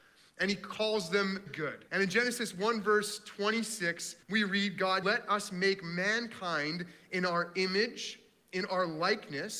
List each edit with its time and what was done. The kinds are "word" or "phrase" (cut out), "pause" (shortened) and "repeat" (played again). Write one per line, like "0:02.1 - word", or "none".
0:01.5 - word
0:01.9 - pause
0:04.2 - pause
0:05.0 - word